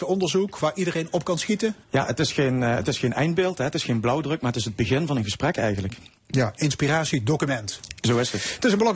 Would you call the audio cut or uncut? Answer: cut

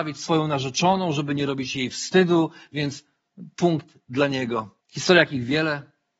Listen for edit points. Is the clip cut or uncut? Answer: cut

